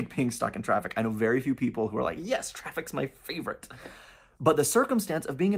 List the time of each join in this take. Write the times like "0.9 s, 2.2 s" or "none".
none